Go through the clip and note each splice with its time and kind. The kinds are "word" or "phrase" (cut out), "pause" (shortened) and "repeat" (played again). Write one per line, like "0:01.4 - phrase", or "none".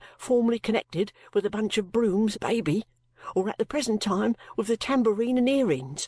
0:02.3 - word